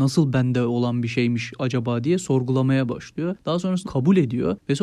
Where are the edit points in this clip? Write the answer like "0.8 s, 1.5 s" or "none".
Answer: 3.9 s